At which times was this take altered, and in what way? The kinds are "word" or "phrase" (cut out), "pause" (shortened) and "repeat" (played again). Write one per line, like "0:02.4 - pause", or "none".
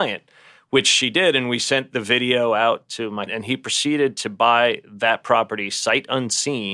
0:03.3 - word